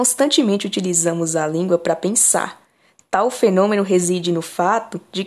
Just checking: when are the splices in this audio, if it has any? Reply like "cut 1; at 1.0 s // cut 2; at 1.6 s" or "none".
none